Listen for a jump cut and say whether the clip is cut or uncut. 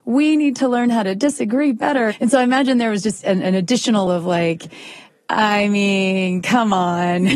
cut